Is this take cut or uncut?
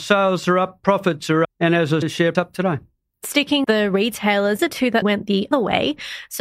cut